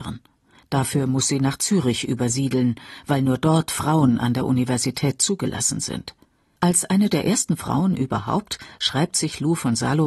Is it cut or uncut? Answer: cut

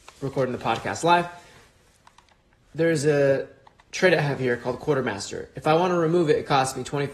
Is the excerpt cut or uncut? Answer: uncut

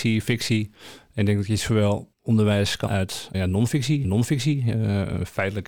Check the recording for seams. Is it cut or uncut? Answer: cut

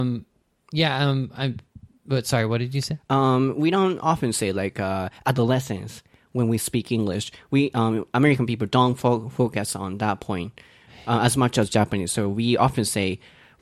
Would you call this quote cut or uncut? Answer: uncut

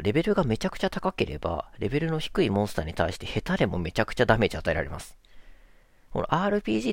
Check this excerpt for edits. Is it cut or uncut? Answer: uncut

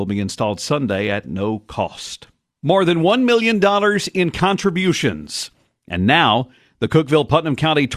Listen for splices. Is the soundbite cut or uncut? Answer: uncut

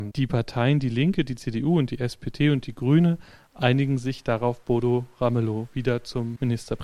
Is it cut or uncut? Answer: uncut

